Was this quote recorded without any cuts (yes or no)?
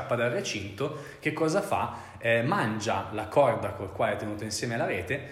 yes